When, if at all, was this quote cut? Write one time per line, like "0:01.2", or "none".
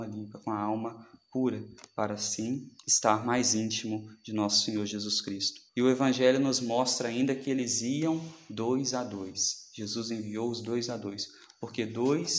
0:02.8
0:05.7

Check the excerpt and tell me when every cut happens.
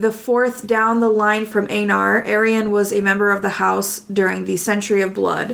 none

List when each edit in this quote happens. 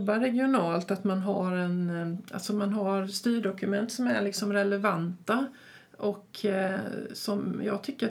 none

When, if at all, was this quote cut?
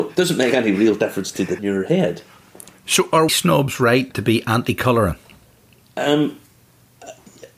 0:01.6
0:03.3
0:04.1

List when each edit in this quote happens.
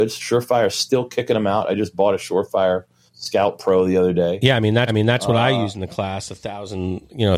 0:03.1
0:04.9

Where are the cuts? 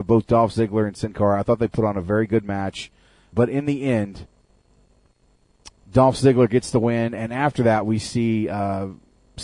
0:03.3
0:05.8

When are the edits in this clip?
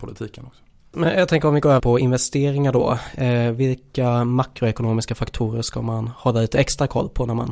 0:01.8

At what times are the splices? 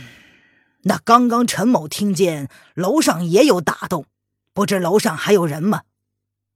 none

